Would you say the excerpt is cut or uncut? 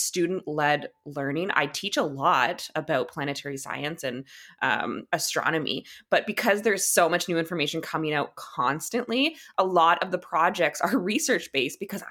uncut